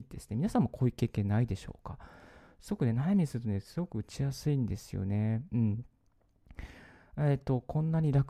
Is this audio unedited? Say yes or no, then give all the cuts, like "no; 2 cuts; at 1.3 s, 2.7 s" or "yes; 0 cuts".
yes; 0 cuts